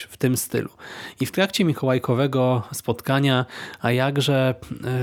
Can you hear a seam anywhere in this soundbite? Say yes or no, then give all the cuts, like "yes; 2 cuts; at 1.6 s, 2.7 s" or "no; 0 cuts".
no; 0 cuts